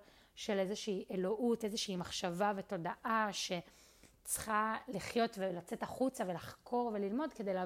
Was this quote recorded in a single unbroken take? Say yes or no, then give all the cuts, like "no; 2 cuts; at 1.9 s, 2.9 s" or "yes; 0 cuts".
yes; 0 cuts